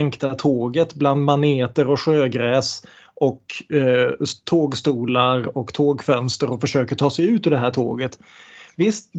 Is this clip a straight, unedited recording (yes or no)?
yes